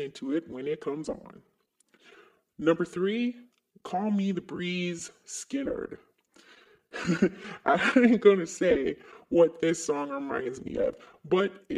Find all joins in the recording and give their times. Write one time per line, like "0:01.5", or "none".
none